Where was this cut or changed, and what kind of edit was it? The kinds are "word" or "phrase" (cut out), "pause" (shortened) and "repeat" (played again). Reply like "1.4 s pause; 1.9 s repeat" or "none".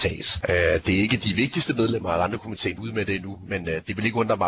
2.8 s phrase